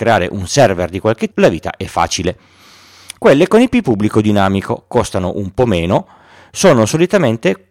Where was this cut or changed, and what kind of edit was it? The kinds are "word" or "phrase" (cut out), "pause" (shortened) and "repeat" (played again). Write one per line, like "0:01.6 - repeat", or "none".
0:01.3 - word